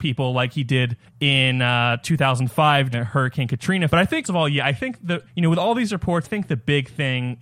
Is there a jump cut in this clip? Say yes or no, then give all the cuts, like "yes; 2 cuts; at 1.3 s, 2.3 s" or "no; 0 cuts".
yes; 6 cuts; at 1.0 s, 2.9 s, 3.9 s, 4.2 s, 5.3 s, 6.2 s